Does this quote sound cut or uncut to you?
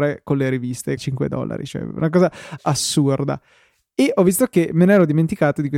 cut